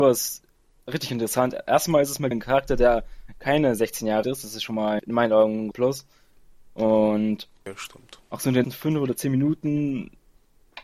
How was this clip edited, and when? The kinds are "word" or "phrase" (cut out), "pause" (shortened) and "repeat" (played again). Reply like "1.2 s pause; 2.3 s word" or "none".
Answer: 2.3 s word; 4.2 s word; 5.0 s word; 5.7 s word; 8.6 s word